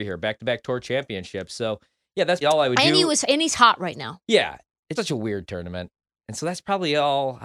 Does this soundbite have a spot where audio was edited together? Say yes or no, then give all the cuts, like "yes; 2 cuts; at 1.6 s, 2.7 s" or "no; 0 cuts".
yes; 2 cuts; at 2.4 s, 5.0 s